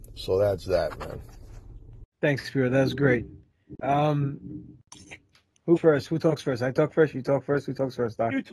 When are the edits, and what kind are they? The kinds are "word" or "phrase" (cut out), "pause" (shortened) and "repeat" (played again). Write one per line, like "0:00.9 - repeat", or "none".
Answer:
0:02.1 - pause
0:05.8 - word

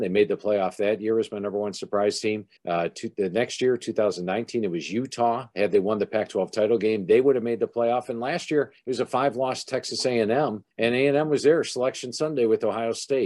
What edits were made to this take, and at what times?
0:02.6 - pause
0:08.8 - pause
0:10.7 - pause

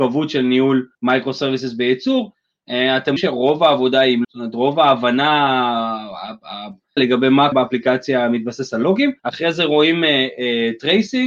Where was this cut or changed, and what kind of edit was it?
0:00.9 - pause
0:03.2 - word
0:04.2 - word
0:07.0 - word
0:07.5 - word
0:09.2 - pause

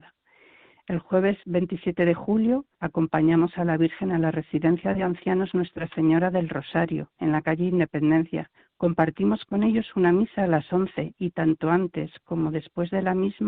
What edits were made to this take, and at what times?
0:01.4 - pause
0:02.7 - pause
0:08.6 - pause

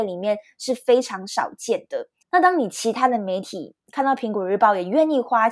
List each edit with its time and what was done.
0:02.2 - pause

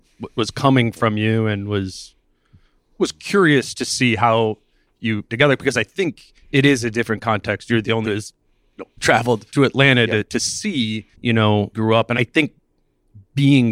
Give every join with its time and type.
0:05.3 - phrase
0:06.4 - pause
0:08.0 - phrase
0:09.0 - word
0:09.5 - pause
0:11.1 - pause
0:11.7 - phrase
0:12.1 - word

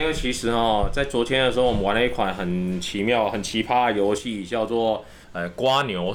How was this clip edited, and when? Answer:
0:05.2 - pause

